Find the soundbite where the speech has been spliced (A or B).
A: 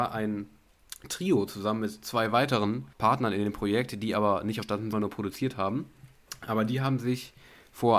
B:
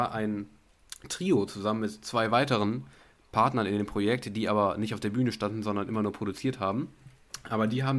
A